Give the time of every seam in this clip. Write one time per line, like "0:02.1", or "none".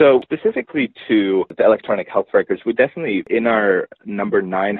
none